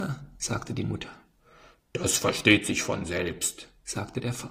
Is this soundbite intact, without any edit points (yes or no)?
yes